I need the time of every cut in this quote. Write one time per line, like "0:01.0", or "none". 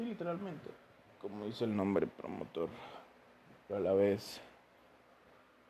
0:03.7